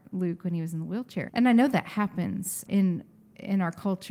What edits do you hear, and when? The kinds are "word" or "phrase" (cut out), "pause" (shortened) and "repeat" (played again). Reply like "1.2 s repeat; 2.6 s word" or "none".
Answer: 1.3 s word; 2.7 s word